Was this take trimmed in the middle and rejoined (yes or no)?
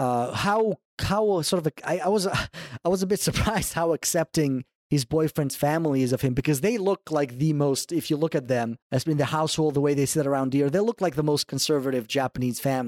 yes